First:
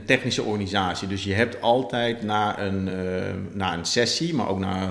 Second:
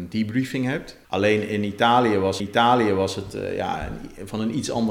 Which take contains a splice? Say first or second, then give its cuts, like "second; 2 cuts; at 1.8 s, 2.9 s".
second; 2 cuts; at 1.0 s, 2.4 s